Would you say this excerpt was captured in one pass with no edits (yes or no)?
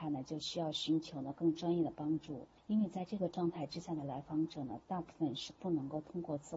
no